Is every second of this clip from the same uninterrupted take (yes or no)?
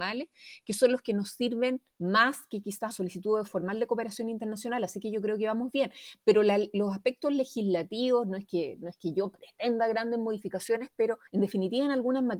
no